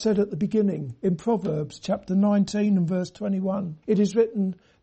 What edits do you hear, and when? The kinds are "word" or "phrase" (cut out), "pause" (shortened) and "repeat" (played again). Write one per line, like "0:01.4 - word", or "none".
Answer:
0:03.8 - pause